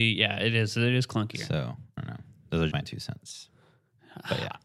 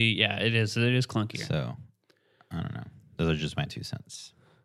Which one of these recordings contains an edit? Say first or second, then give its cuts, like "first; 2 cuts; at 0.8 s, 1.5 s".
first; 2 cuts; at 2.0 s, 2.7 s